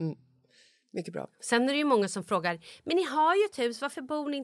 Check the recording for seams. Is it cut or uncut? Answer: uncut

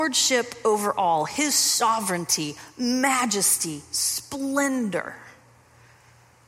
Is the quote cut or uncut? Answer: uncut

